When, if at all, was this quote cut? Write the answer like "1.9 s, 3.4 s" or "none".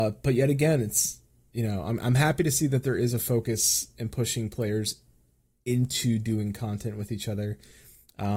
none

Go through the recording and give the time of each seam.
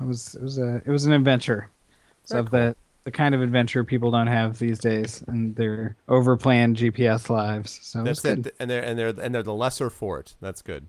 6.0 s

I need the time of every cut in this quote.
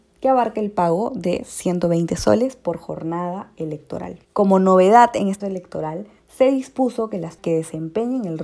4.2 s, 5.4 s, 6.2 s, 7.4 s

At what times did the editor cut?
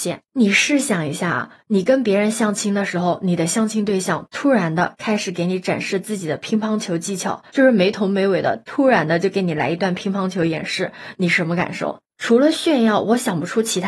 7.5 s

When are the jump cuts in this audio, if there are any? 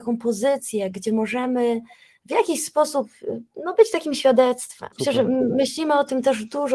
4.9 s

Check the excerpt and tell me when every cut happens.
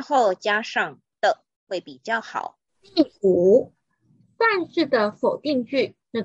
1.5 s, 2.7 s

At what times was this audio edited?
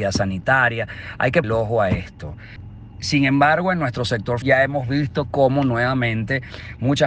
1.4 s, 4.4 s

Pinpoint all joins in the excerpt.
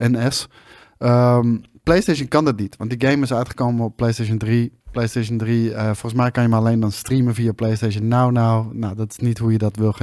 4.8 s

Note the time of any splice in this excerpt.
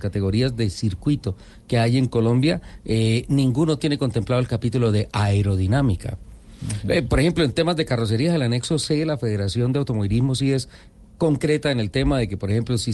none

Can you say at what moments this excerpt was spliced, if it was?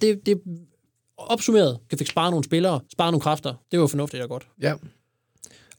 1.9 s, 2.8 s, 3.6 s, 4.5 s

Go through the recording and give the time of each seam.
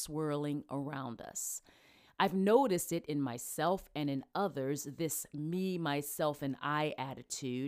none

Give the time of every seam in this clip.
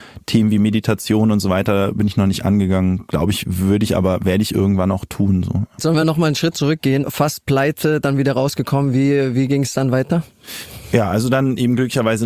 none

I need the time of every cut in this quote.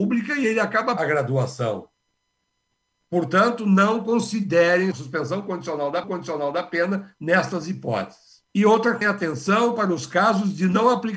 1.0 s, 4.9 s, 6.0 s, 8.5 s, 9.0 s

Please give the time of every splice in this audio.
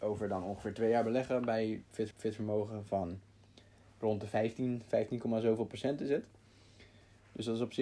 2.1 s

